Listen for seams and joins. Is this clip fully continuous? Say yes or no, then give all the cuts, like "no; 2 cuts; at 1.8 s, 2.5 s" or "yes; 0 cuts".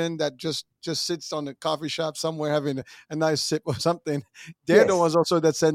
yes; 0 cuts